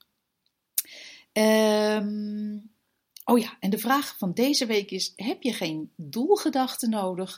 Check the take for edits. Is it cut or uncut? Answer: uncut